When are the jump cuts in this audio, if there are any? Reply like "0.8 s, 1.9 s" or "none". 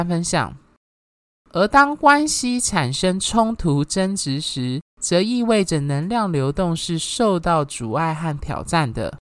4.9 s

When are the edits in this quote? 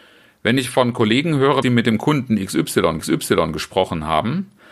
1.6 s, 3.0 s

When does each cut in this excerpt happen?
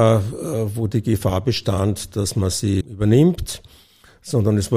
2.8 s

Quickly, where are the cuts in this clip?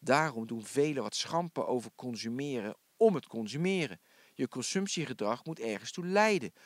none

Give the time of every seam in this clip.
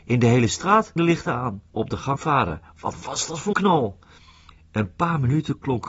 1.0 s, 1.7 s, 2.2 s, 3.5 s

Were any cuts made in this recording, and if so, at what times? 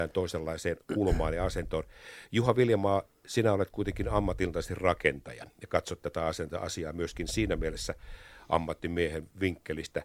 none

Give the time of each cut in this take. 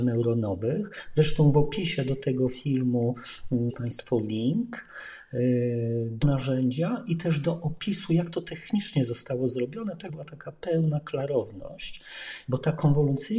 3.7 s, 6.2 s, 10.1 s

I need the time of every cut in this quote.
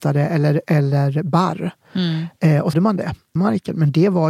2.7 s, 3.4 s

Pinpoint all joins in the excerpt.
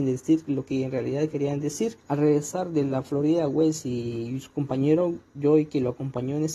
2.0 s, 5.3 s

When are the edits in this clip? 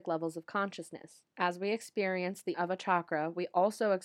2.5 s

